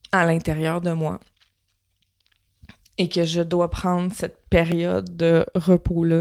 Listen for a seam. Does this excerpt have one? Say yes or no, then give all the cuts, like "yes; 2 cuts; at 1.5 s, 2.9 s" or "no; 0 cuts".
no; 0 cuts